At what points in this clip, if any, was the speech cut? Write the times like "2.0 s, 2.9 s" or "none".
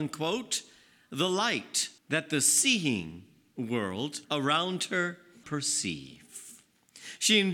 2.0 s, 4.2 s, 5.4 s